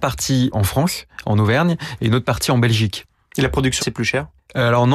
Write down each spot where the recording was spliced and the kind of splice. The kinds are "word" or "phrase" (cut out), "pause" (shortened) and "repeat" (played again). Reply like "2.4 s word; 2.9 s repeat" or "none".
3.8 s word